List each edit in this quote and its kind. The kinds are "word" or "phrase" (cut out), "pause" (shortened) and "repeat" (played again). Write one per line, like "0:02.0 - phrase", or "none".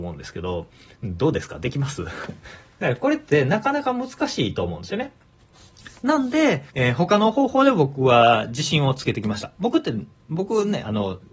0:06.7 - pause